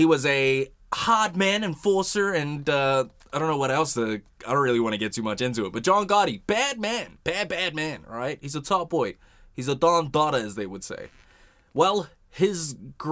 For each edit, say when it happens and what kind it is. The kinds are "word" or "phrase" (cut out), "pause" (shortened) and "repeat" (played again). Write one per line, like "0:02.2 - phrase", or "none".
none